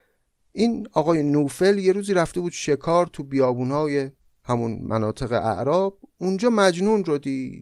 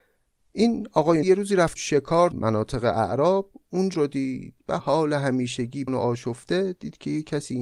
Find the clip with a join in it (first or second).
second